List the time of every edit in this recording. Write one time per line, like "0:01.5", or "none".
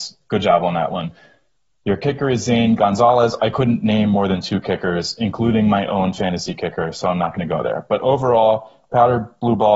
none

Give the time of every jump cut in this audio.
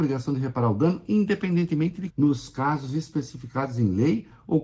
0:02.1

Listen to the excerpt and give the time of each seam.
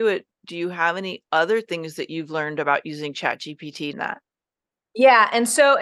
0:03.9

